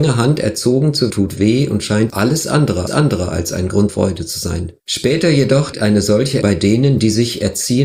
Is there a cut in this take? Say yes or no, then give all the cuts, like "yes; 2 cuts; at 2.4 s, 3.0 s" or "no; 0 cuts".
yes; 7 cuts; at 1.1 s, 2.1 s, 2.9 s, 3.9 s, 4.8 s, 5.7 s, 6.4 s